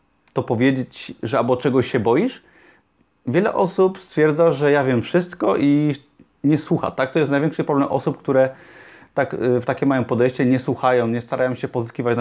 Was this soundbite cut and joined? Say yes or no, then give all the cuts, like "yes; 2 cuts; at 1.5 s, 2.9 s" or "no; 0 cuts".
no; 0 cuts